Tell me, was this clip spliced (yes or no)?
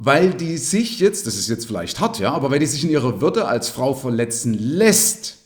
no